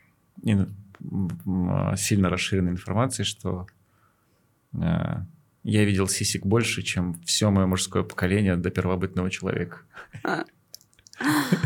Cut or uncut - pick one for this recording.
uncut